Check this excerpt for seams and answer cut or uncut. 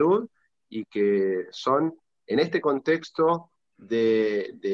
uncut